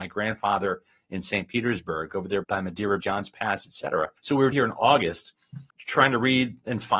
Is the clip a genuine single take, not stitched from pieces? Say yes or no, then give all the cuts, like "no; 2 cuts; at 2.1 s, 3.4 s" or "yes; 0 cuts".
no; 5 cuts; at 2.4 s, 3.0 s, 4.2 s, 4.5 s, 5.7 s